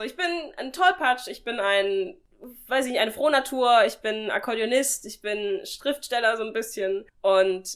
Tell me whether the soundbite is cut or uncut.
uncut